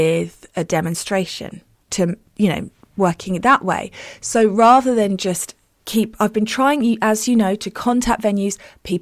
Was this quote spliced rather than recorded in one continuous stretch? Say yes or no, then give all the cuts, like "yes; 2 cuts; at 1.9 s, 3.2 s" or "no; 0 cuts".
no; 0 cuts